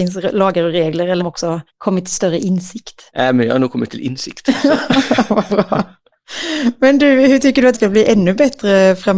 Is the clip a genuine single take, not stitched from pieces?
no; 4 cuts; at 1.2 s, 1.7 s, 3.1 s, 7.7 s

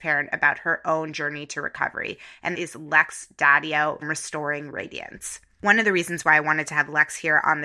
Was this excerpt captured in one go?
no; 2 cuts; at 2.5 s, 4.0 s

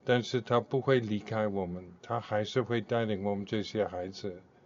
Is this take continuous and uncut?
no; 1 cut; at 2.0 s

